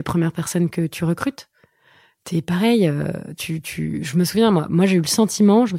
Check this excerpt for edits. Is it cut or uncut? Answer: uncut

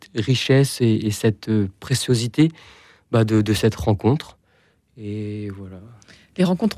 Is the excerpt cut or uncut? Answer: uncut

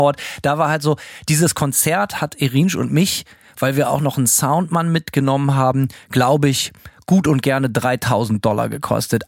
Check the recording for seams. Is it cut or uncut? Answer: uncut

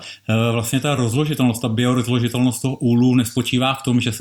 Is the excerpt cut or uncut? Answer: uncut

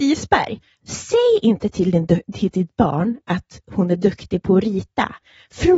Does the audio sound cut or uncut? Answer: uncut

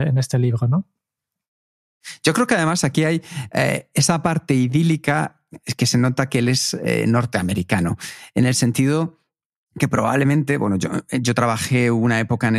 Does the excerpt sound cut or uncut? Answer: uncut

